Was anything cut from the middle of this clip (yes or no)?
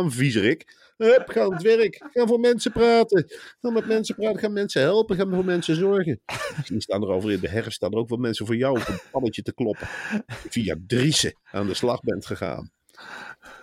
no